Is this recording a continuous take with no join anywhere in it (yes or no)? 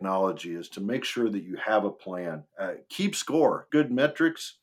no